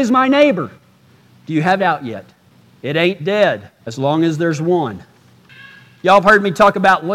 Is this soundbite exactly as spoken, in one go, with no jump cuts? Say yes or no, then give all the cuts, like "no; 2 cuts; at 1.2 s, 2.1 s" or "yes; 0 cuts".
no; 2 cuts; at 1.8 s, 3.8 s